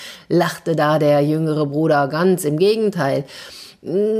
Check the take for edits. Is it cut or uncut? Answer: uncut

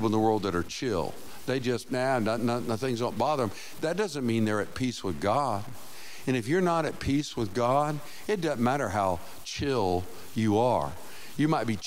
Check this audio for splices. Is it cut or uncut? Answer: uncut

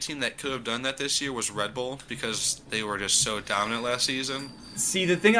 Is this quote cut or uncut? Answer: cut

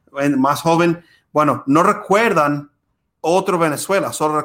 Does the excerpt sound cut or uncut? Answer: uncut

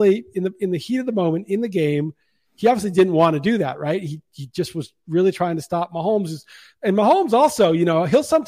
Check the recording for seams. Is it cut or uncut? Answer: uncut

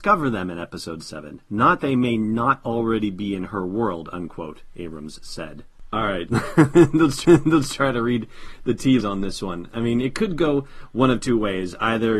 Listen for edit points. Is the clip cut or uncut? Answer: cut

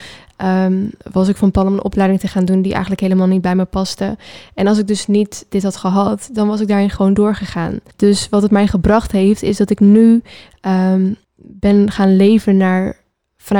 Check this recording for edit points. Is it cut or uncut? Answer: cut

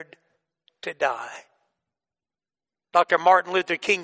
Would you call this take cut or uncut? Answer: uncut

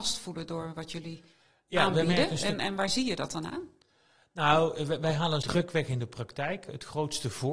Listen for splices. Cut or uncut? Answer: cut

